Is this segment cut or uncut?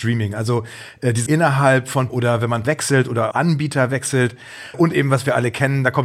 cut